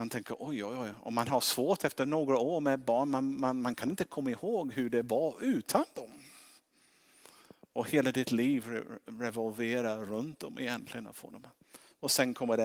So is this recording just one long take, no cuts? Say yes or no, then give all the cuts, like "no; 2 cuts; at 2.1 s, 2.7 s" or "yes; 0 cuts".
yes; 0 cuts